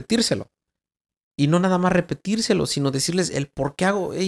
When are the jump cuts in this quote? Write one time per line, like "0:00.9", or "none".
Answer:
none